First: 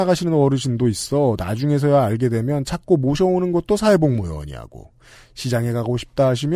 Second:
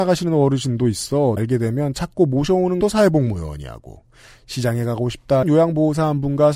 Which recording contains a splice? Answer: second; 3 cuts; at 1.4 s, 2.8 s, 5.4 s

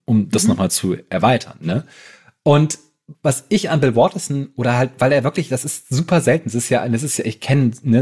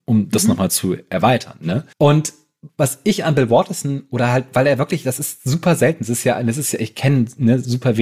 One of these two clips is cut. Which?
second; 1 cut; at 1.9 s

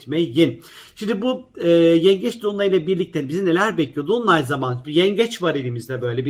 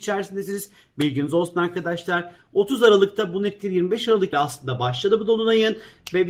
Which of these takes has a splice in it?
second; 1 cut; at 4.3 s

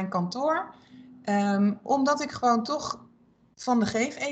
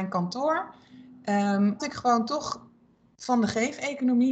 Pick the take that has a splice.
second; 1 cut; at 1.8 s

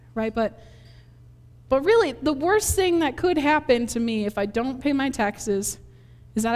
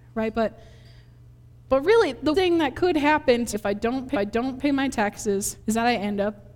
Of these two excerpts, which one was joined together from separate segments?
second; 4 cuts; at 2.3 s, 3.5 s, 4.1 s, 5.6 s

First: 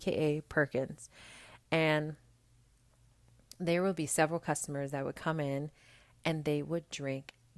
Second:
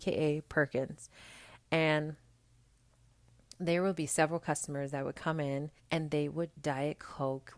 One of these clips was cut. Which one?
second; 2 cuts; at 5.8 s, 6.5 s

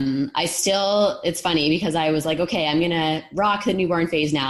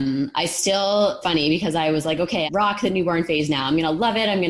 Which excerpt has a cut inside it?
second; 2 cuts; at 1.2 s, 2.5 s

